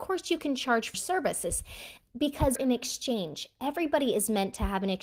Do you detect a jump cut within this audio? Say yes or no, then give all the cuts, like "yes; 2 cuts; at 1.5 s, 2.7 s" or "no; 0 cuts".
yes; 2 cuts; at 0.9 s, 2.6 s